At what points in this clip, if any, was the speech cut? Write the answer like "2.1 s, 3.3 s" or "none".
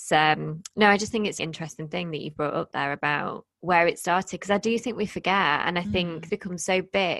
1.4 s, 3.5 s, 6.3 s